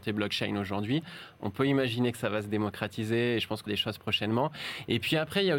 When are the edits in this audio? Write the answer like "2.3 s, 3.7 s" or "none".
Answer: 3.7 s